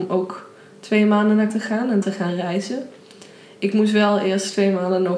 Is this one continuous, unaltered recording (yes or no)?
no